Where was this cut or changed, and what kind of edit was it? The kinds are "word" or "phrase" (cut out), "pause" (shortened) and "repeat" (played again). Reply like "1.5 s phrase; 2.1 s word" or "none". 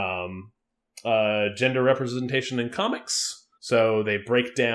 3.5 s pause